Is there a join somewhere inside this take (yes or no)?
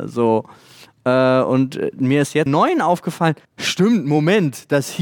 yes